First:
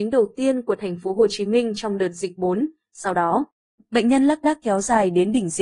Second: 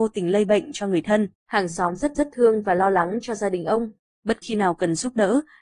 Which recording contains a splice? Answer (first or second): second